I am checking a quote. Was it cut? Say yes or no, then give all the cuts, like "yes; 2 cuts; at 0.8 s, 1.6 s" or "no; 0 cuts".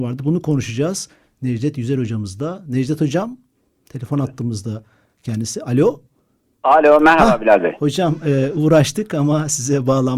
no; 0 cuts